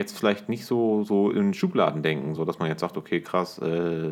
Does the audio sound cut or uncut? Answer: uncut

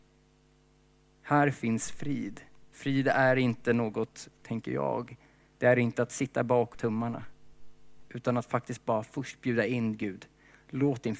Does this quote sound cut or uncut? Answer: cut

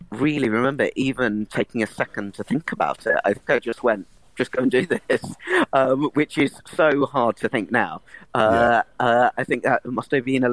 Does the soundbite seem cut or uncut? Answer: uncut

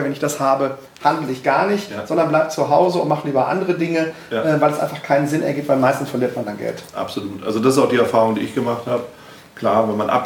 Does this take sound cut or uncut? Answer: uncut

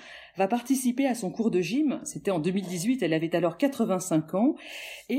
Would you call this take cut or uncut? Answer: uncut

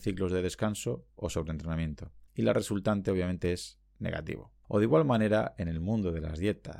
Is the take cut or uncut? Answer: cut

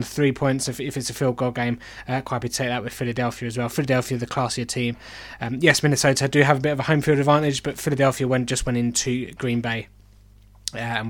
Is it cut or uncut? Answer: uncut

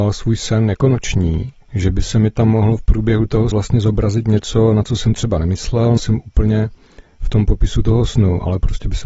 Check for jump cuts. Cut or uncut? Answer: cut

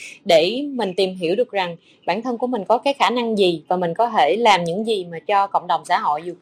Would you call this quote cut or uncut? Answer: uncut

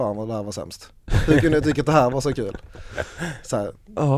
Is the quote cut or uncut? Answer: uncut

